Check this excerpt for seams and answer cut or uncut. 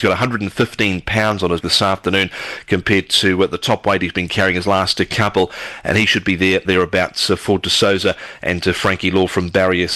cut